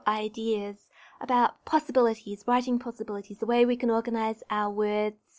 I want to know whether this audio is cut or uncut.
uncut